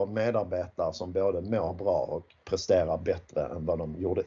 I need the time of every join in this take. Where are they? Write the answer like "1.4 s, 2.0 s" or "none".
2.4 s